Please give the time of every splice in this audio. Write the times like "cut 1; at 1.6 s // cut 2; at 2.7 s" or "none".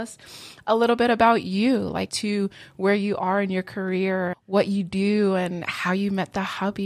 cut 1; at 2.1 s // cut 2; at 4.3 s